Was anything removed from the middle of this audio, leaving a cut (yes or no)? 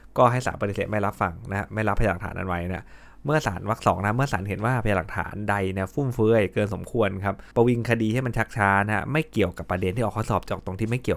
yes